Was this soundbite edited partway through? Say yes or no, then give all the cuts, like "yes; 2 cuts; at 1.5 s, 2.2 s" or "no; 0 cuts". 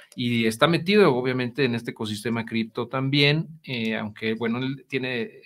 no; 0 cuts